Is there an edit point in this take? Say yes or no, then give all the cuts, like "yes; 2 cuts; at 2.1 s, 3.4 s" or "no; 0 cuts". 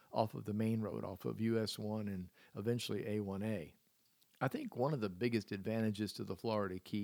no; 0 cuts